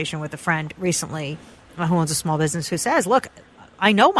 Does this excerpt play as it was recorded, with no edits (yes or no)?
yes